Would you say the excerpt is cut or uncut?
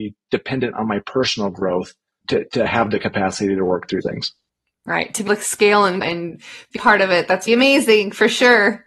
cut